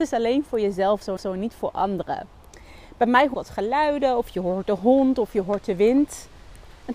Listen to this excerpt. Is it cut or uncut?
cut